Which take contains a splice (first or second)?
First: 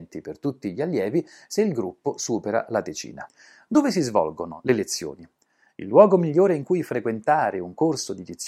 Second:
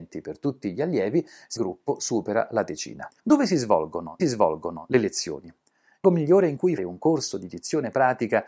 second